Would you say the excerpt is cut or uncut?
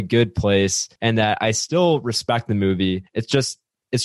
cut